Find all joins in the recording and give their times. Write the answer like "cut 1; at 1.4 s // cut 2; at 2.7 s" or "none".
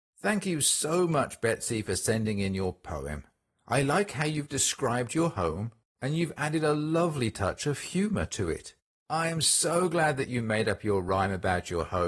none